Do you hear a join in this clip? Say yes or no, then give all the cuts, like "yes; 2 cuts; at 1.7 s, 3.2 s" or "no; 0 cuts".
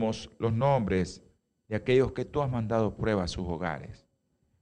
no; 0 cuts